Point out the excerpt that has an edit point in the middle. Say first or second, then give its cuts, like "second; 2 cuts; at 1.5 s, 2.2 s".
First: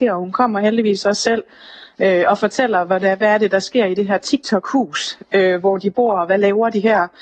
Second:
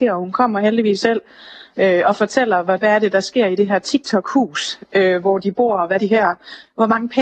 second; 3 cuts; at 1.0 s, 2.8 s, 6.0 s